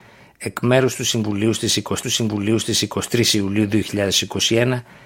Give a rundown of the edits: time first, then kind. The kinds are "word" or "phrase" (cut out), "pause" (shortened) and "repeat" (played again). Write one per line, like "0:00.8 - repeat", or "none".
0:02.0 - repeat